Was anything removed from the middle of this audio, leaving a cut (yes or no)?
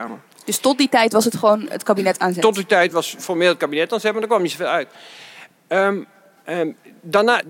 no